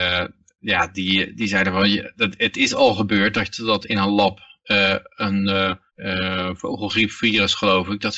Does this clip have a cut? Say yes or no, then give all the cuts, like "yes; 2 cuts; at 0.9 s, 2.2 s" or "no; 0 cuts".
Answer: no; 0 cuts